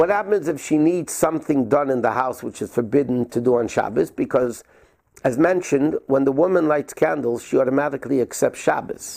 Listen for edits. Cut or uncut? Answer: uncut